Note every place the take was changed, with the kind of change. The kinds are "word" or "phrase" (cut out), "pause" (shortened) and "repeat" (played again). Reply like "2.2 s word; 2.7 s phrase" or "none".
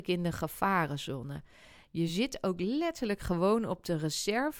none